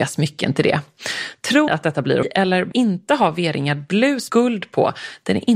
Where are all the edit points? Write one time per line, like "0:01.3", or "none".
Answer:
0:01.7
0:02.2
0:02.7
0:04.3